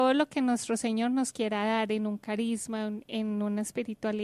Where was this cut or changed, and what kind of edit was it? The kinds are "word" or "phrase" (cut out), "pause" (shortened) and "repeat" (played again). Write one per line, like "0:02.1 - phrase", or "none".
none